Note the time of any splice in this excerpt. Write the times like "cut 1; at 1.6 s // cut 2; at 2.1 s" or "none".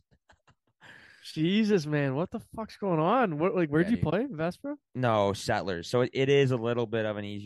none